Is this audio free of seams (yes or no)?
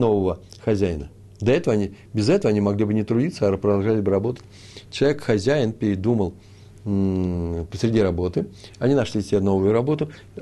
yes